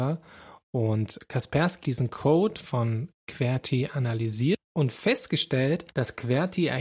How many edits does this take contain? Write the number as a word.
two